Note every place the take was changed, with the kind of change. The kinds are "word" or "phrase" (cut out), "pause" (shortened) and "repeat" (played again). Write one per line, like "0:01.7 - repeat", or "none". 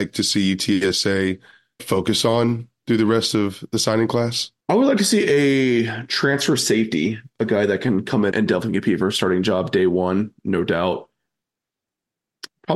0:01.8 - word
0:04.6 - pause
0:08.3 - word